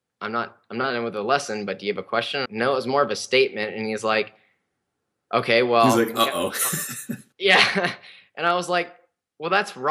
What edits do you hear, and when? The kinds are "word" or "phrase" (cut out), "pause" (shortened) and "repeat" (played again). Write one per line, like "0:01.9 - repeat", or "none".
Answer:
0:02.4 - phrase